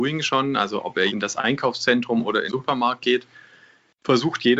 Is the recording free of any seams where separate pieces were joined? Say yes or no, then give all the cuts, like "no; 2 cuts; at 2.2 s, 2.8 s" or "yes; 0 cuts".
no; 2 cuts; at 1.1 s, 2.5 s